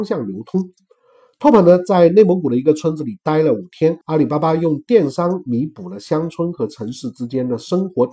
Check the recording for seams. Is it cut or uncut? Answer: cut